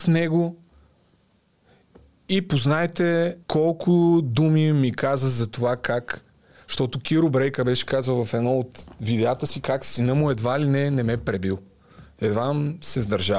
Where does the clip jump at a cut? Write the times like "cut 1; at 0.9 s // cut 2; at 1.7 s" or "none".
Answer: cut 1; at 3.4 s